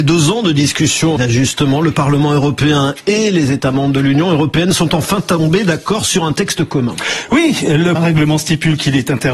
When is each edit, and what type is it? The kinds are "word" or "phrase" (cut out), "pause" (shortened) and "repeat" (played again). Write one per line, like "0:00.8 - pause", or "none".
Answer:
0:01.2 - word
0:07.9 - word